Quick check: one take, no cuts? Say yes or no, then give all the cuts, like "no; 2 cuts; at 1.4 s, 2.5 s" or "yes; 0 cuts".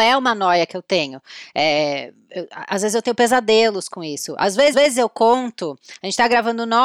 no; 1 cut; at 4.7 s